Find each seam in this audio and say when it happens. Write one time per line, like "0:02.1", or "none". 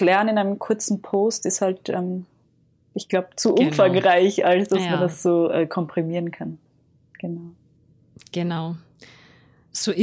none